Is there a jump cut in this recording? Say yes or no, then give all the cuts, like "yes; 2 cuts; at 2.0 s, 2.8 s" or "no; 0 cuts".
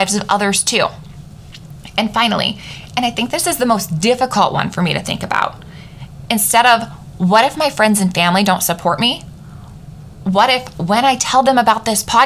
no; 0 cuts